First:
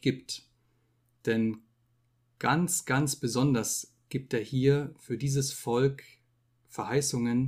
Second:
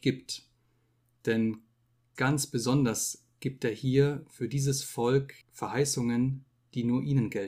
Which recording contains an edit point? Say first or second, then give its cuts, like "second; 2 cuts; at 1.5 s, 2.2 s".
second; 2 cuts; at 2.2 s, 5.4 s